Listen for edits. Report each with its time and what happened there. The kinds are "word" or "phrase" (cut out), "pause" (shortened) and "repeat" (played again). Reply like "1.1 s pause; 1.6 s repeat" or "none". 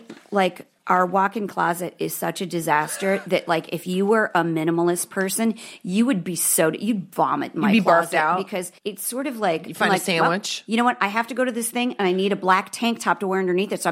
8.8 s pause